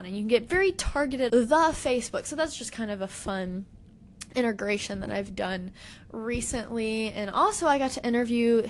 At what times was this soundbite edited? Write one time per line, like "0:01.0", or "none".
0:01.3